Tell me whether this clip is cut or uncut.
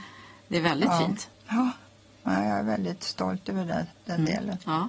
cut